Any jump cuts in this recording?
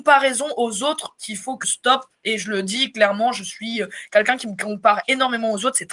yes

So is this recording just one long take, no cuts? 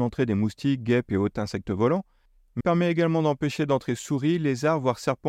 no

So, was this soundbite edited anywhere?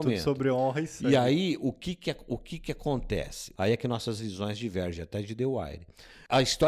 no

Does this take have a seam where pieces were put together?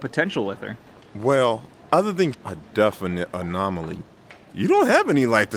yes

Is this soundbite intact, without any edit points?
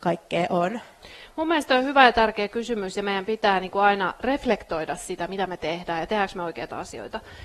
yes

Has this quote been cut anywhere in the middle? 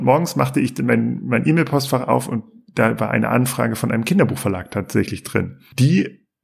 no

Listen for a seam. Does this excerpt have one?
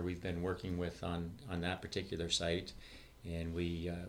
no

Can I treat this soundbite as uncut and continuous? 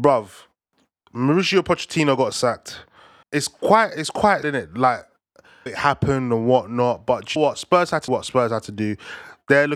no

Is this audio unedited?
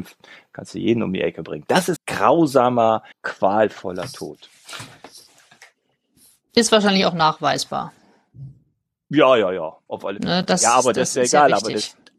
no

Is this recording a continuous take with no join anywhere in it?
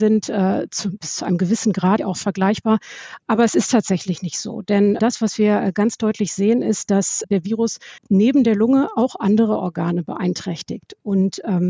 no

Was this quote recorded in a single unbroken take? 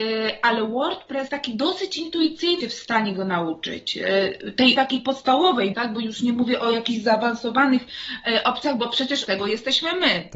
no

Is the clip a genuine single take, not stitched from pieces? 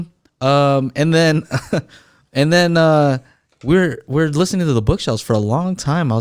yes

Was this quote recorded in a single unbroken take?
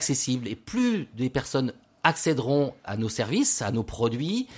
no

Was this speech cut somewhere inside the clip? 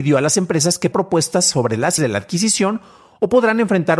yes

